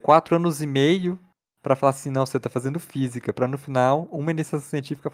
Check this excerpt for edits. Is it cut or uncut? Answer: uncut